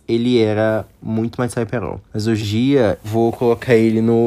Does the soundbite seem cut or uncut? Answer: cut